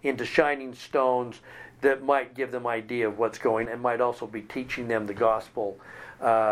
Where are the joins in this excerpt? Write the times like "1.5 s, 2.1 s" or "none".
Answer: 3.6 s